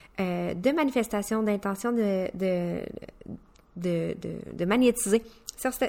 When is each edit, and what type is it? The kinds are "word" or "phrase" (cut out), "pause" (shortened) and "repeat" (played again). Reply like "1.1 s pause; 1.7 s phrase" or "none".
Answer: none